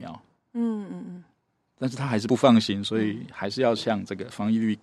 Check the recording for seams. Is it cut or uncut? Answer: uncut